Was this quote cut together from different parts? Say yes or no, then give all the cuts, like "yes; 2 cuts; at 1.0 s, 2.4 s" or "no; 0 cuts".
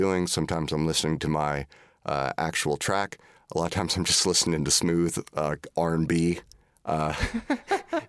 no; 0 cuts